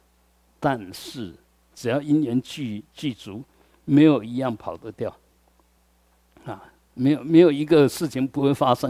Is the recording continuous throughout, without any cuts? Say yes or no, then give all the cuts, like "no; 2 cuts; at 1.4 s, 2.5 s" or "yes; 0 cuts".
yes; 0 cuts